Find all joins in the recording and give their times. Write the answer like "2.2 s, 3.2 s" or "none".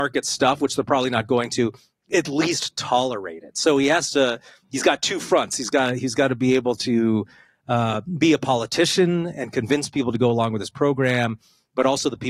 none